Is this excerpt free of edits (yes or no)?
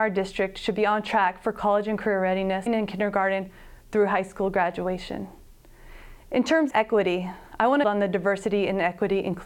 no